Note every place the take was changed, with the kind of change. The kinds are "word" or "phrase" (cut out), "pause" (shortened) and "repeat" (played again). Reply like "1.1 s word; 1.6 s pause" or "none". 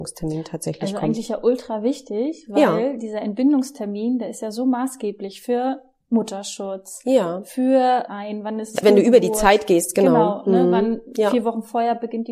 8.1 s phrase; 8.8 s word

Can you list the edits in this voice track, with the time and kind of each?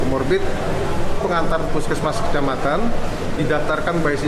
1.2 s word; 1.7 s word; 3.4 s word

